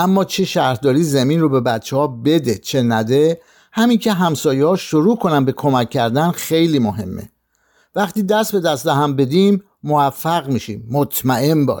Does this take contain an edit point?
no; 0 cuts

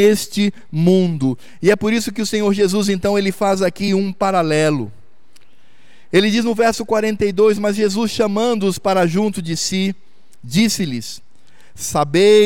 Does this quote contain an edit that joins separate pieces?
no; 0 cuts

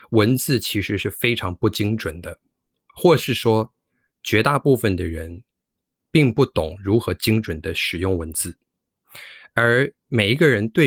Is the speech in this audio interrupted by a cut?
no; 0 cuts

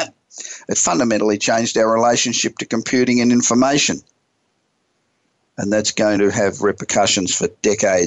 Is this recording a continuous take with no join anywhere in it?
yes; 0 cuts

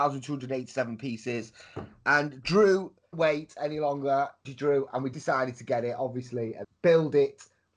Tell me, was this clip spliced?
yes; 4 cuts; at 3.1 s, 4.4 s, 5.1 s, 6.6 s

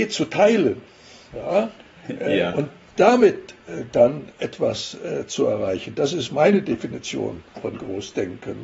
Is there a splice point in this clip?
yes; 1 cut; at 7.5 s

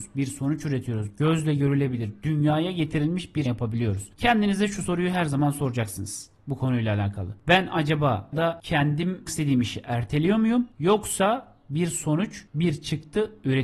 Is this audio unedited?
no; 3 cuts; at 3.5 s, 8.3 s, 9.3 s

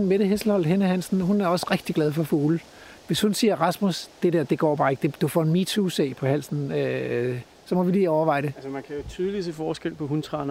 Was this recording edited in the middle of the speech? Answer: no; 0 cuts

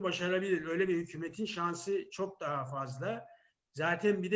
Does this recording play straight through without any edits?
yes; 0 cuts

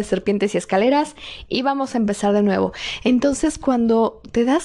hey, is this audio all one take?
yes; 0 cuts

